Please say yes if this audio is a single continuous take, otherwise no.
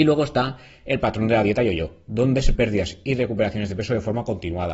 no